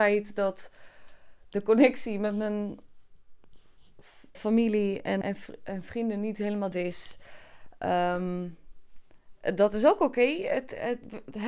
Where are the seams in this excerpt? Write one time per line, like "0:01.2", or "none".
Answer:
0:04.3
0:05.2
0:06.7

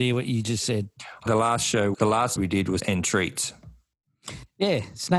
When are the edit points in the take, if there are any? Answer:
0:01.3
0:01.9
0:02.4
0:02.8

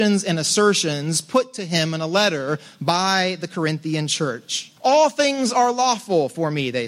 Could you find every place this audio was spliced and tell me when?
0:04.8

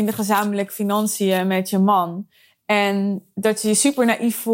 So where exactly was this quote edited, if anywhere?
none

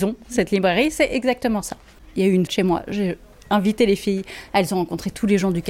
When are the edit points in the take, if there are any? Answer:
0:02.5

